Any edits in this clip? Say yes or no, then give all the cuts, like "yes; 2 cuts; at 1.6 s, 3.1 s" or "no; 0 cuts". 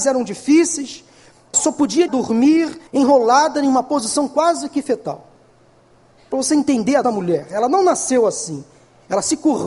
yes; 5 cuts; at 1.5 s, 2.1 s, 2.9 s, 6.3 s, 7.0 s